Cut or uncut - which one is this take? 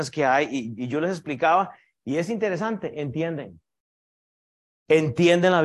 uncut